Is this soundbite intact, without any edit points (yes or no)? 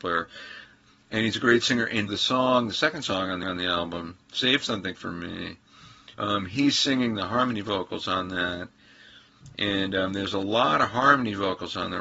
no